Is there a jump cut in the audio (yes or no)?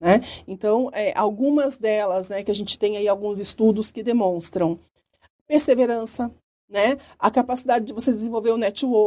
no